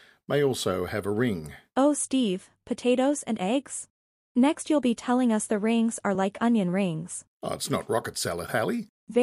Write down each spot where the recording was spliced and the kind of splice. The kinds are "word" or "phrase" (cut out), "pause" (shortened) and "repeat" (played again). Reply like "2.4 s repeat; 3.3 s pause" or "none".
none